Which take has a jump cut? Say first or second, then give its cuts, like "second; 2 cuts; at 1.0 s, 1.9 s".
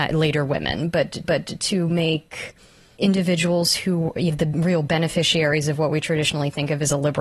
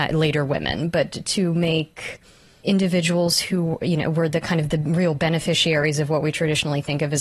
first; 2 cuts; at 1.2 s, 4.3 s